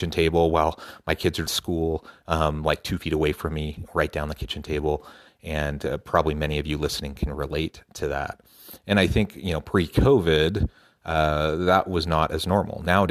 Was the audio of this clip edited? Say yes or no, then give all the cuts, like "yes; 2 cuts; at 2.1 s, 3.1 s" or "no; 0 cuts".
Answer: yes; 1 cut; at 1.5 s